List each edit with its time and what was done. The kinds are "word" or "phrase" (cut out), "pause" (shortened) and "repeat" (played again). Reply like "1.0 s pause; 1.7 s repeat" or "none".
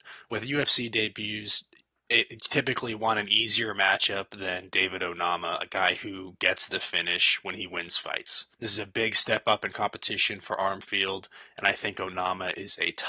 none